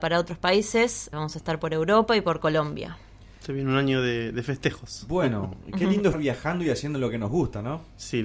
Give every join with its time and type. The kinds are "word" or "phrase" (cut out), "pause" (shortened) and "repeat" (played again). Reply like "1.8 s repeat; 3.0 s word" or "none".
1.1 s word; 6.1 s word